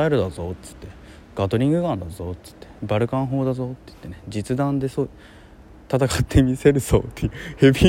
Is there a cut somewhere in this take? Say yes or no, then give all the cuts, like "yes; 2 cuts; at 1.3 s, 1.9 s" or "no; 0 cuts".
no; 0 cuts